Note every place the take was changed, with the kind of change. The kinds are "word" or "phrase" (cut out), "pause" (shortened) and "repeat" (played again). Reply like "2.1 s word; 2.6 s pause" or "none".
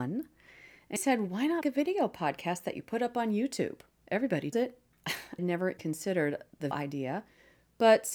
1.0 s word; 1.6 s word; 4.5 s word; 5.4 s word; 5.8 s word; 6.7 s word